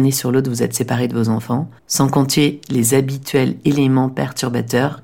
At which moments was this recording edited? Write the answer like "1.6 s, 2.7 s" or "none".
1.8 s